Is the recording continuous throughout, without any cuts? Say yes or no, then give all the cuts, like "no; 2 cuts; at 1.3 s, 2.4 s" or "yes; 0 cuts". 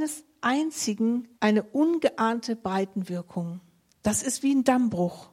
no; 2 cuts; at 1.3 s, 3.9 s